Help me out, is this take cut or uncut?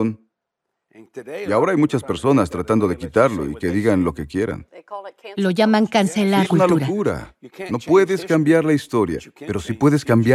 cut